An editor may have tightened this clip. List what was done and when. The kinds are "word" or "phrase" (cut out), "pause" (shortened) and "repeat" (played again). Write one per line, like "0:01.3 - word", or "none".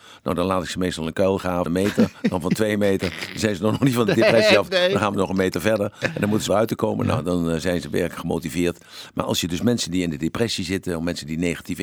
0:01.7 - phrase
0:06.5 - phrase